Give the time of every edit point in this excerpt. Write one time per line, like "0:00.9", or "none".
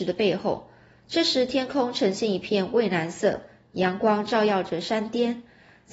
none